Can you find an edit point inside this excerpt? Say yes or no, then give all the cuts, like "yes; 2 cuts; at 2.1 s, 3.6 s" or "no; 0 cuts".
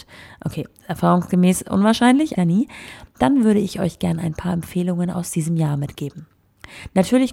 yes; 1 cut; at 2.4 s